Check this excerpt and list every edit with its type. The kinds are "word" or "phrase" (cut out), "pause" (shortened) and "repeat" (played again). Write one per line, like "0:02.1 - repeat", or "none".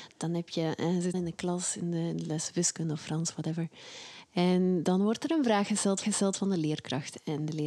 0:01.1 - word
0:06.0 - repeat